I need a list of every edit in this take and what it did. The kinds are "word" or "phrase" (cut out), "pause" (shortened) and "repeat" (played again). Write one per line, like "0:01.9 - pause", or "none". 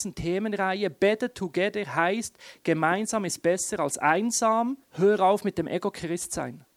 0:04.8 - pause